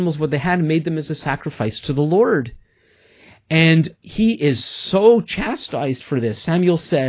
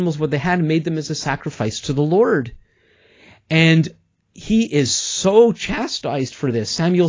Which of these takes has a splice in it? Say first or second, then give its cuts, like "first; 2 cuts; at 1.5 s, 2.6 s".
first; 1 cut; at 3.9 s